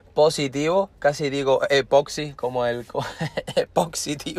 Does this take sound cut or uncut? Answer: uncut